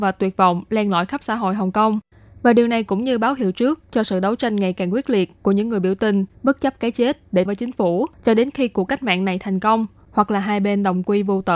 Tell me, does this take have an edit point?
yes; 3 cuts; at 6.3 s, 7.5 s, 8.1 s

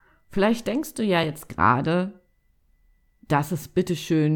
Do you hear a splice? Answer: no; 0 cuts

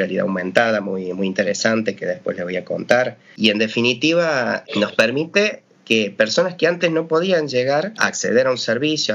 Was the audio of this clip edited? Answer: no; 0 cuts

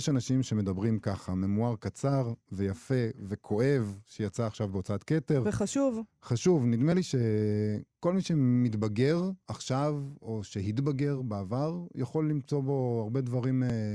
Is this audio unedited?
yes; 0 cuts

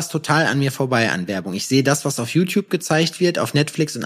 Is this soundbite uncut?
yes; 0 cuts

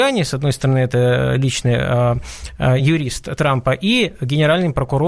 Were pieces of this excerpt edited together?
no; 0 cuts

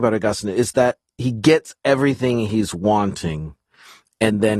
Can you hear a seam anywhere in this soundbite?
no; 0 cuts

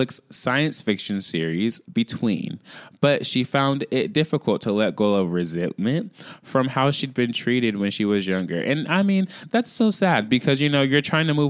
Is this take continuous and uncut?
no; 1 cut; at 1.8 s

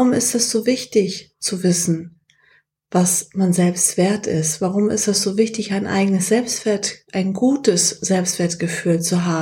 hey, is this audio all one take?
yes; 0 cuts

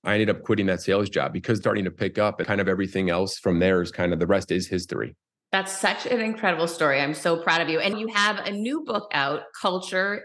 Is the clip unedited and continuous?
no; 4 cuts; at 1.6 s, 2.4 s, 5.3 s, 7.9 s

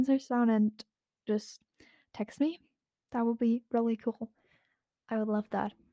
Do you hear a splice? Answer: no; 0 cuts

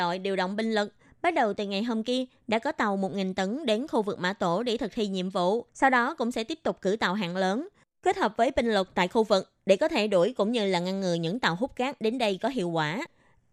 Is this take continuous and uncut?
no; 1 cut; at 5.7 s

